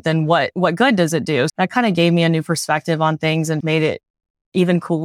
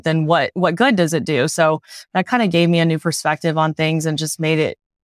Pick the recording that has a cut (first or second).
first